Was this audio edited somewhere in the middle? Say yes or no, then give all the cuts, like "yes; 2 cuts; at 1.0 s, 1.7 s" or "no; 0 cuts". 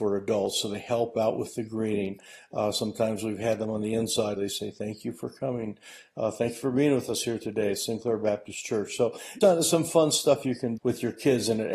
yes; 3 cuts; at 4.4 s, 9.4 s, 10.8 s